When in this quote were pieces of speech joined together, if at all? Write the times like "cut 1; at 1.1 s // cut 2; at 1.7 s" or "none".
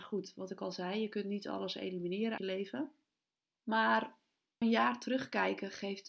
cut 1; at 2.4 s // cut 2; at 4.6 s

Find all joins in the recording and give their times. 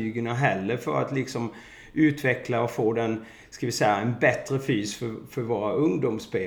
none

